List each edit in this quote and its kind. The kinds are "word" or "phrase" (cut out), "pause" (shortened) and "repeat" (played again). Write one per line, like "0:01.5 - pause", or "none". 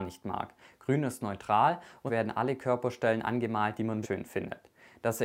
0:02.1 - phrase
0:04.0 - word

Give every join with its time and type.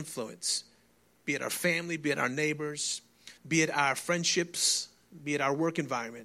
0:03.4 - pause

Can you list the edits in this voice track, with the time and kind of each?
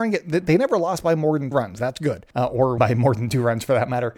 0:01.5 - word
0:02.3 - pause
0:02.8 - word

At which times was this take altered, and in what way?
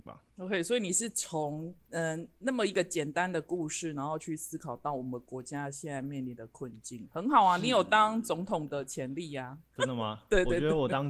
0:09.8 - word

